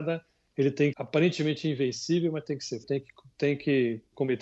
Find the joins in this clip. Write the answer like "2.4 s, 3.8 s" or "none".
0.9 s, 2.8 s